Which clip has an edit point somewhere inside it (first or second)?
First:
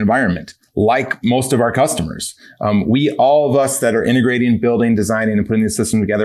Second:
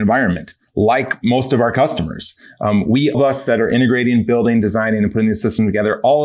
second